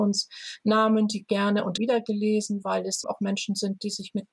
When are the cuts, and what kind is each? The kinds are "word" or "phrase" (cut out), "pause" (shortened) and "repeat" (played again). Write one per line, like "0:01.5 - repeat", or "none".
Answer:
0:01.8 - word
0:02.6 - word
0:03.0 - word